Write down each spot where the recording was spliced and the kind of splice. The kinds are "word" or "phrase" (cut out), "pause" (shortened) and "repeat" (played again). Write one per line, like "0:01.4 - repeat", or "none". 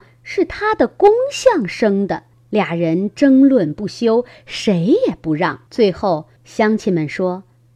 0:02.3 - pause
0:05.7 - pause
0:06.4 - pause

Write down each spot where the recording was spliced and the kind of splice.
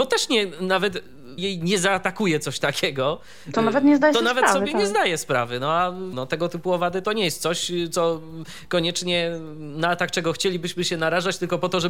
0:01.4 - phrase
0:06.1 - word
0:07.0 - word

